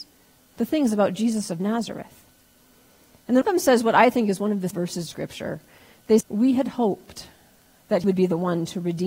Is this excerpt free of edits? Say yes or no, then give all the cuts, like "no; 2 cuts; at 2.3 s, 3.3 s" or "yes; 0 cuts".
no; 5 cuts; at 3.4 s, 4.7 s, 5.1 s, 6.2 s, 8.0 s